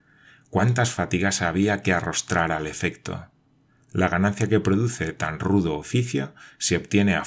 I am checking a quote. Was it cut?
no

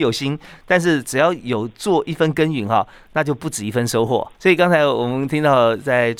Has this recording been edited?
yes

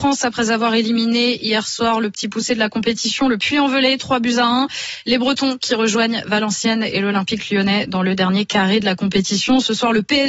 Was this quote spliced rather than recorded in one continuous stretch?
no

